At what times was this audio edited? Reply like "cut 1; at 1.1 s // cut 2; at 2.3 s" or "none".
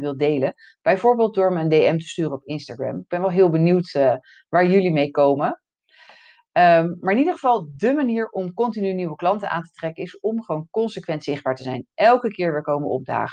none